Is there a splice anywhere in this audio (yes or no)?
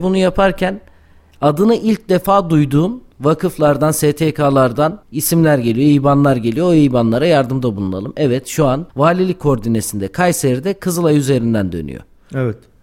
yes